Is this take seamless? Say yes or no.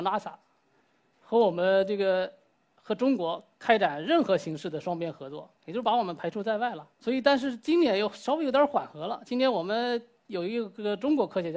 no